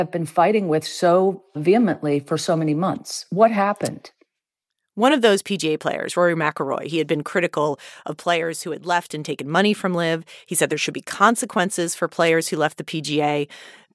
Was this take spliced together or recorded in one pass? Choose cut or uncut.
uncut